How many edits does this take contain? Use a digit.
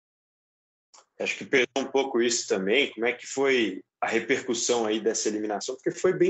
1